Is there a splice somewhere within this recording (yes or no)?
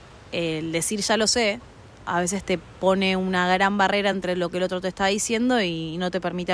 no